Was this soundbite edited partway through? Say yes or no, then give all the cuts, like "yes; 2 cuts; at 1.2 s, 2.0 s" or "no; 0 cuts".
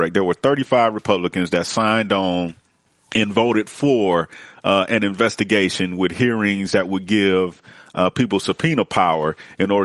no; 0 cuts